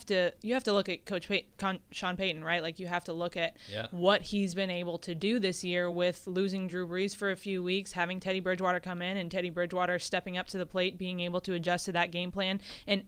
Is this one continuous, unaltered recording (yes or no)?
yes